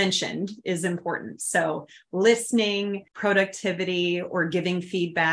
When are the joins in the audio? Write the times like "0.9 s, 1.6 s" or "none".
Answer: 3.1 s